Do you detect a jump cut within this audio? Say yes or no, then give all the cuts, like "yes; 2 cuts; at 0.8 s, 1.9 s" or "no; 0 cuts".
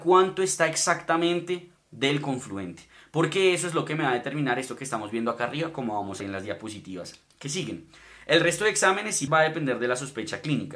yes; 2 cuts; at 6.2 s, 9.3 s